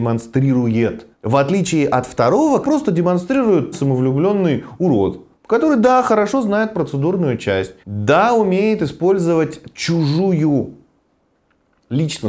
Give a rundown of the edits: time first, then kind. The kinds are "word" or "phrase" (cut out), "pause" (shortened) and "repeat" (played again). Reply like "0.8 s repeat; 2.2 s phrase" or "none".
1.1 s pause; 2.6 s word; 3.7 s phrase; 5.3 s pause; 7.8 s pause